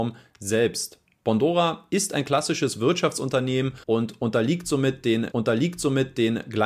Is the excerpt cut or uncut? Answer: cut